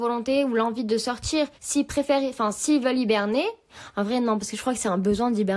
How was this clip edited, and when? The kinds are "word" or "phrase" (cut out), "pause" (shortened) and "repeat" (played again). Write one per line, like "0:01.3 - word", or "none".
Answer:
0:01.6 - pause